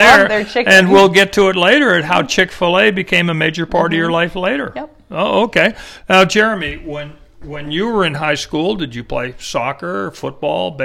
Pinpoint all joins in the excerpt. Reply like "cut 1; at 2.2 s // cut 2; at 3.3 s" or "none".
none